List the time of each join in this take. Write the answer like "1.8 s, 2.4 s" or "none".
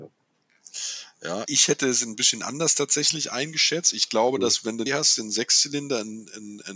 1.5 s, 4.9 s